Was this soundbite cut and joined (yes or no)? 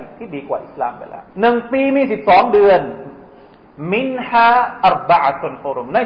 yes